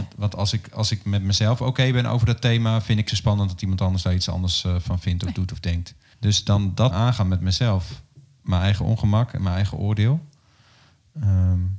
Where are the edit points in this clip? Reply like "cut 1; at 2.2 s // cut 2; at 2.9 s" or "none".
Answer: cut 1; at 3.1 s // cut 2; at 6.1 s // cut 3; at 6.9 s